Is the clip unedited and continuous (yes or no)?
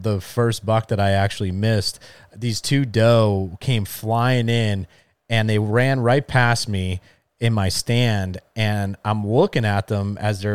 yes